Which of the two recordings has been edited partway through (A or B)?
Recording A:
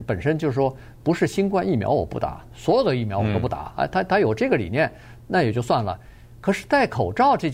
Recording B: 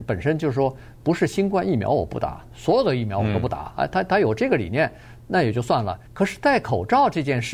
B